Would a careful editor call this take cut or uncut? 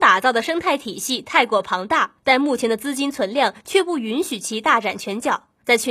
cut